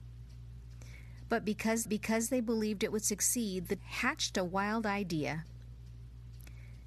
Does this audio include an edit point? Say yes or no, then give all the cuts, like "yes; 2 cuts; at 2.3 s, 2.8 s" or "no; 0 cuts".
yes; 2 cuts; at 1.8 s, 3.8 s